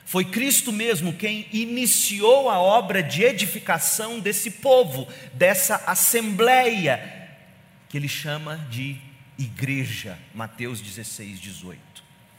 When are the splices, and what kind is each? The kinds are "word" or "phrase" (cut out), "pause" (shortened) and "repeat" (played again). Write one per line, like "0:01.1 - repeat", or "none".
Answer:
none

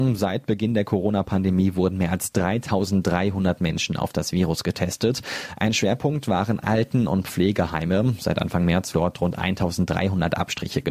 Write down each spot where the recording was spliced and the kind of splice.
0:08.9 - word

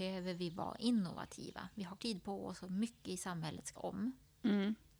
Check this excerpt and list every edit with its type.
0:02.0 - word
0:03.8 - word

